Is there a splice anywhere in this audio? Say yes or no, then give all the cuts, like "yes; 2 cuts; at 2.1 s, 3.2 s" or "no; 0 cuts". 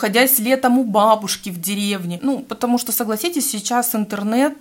no; 0 cuts